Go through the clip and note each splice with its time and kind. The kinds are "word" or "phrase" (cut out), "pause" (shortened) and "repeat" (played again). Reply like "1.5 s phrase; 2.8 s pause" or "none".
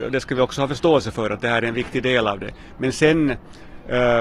none